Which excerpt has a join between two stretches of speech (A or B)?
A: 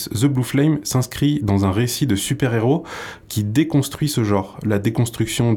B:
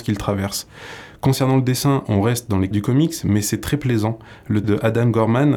B